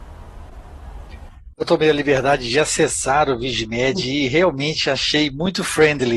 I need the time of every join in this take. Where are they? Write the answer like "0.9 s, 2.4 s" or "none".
none